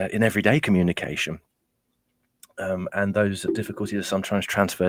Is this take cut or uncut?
uncut